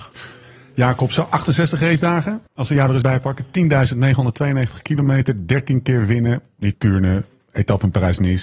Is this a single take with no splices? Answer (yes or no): no